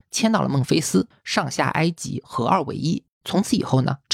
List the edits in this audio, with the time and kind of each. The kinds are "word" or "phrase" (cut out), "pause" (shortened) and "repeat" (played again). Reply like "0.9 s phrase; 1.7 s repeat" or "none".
3.1 s pause

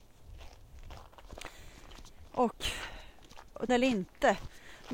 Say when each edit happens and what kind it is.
3.7 s word

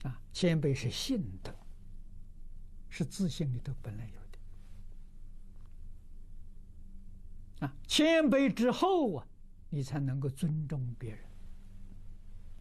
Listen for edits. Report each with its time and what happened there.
2.9 s word

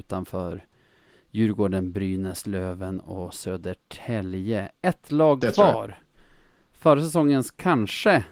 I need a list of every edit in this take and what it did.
none

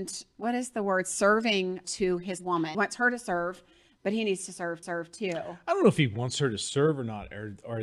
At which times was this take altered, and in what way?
1.8 s word; 2.7 s word; 4.8 s repeat

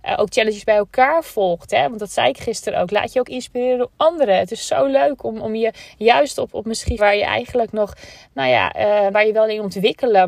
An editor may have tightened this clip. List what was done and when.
7.0 s word; 9.1 s word

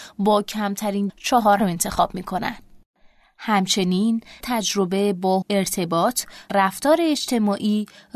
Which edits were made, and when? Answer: 1.1 s word; 1.6 s word; 4.4 s word; 5.4 s word; 6.5 s word

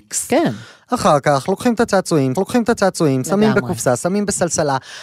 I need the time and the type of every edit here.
2.3 s repeat

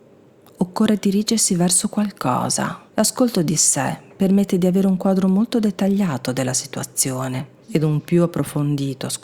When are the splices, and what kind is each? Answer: 2.9 s pause; 7.6 s pause

